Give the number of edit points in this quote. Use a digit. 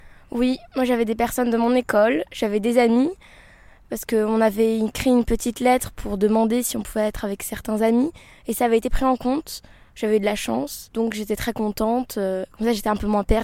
0